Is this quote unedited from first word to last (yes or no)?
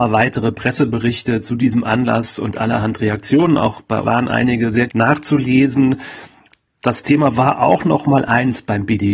no